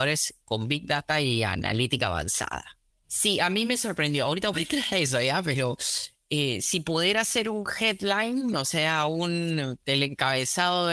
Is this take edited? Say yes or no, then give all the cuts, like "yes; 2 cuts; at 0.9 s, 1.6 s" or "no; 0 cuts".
yes; 1 cut; at 2.9 s